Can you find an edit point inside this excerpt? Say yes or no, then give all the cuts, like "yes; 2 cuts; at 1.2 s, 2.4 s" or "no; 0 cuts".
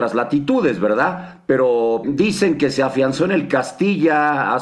yes; 1 cut; at 2.0 s